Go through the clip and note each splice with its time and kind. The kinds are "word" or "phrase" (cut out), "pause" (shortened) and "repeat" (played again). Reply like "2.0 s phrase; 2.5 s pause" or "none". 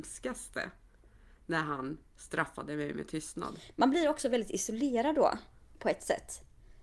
none